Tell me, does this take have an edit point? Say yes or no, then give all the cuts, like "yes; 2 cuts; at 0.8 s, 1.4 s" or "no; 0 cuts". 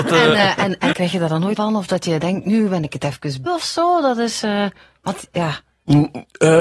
yes; 3 cuts; at 0.9 s, 1.6 s, 3.5 s